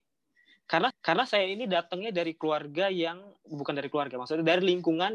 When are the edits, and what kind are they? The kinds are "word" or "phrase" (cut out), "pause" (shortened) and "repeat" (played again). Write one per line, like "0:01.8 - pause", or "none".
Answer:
0:00.9 - repeat